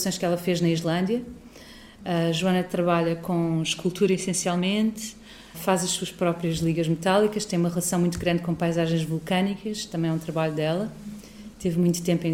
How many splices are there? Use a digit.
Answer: 1